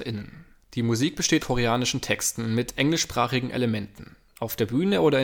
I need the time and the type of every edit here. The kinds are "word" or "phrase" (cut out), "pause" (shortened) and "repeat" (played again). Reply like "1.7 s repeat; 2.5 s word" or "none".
1.4 s word

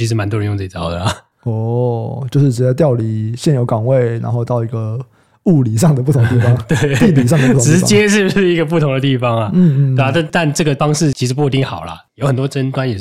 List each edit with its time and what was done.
none

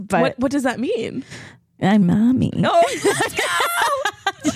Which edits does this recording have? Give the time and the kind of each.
2.0 s word

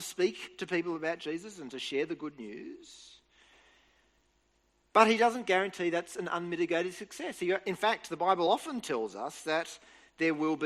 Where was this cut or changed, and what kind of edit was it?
none

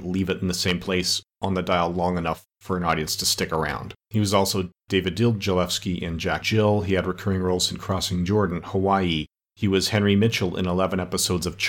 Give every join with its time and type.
2.5 s pause; 4.0 s pause; 6.4 s word; 9.4 s pause

